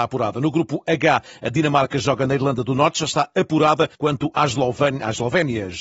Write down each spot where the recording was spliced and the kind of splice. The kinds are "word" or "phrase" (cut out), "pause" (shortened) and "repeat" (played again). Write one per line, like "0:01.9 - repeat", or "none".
0:03.9 - pause